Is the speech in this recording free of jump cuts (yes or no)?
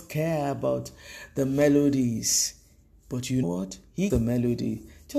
no